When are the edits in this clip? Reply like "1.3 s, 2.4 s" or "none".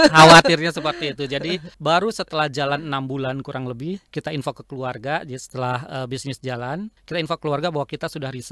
1.7 s, 4.1 s, 7.0 s